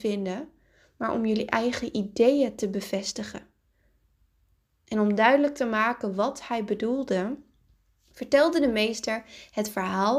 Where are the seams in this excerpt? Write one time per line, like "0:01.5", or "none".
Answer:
none